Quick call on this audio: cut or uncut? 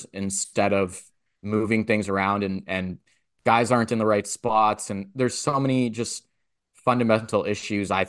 uncut